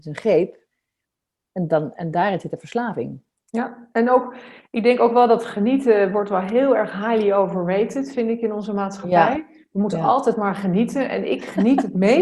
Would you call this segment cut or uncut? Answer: uncut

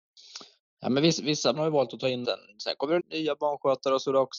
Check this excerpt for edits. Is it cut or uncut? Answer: cut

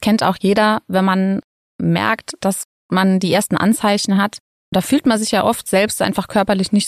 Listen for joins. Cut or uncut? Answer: uncut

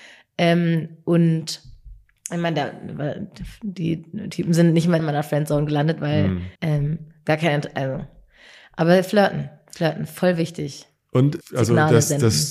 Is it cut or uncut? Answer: cut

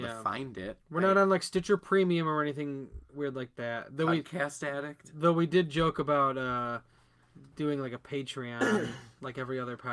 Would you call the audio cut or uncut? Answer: uncut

